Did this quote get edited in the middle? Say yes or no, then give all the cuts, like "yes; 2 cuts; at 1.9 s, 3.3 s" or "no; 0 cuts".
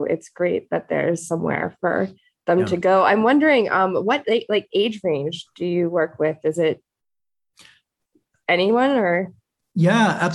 no; 0 cuts